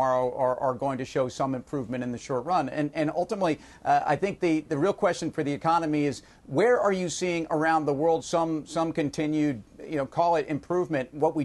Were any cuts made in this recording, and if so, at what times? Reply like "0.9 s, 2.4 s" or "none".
8.2 s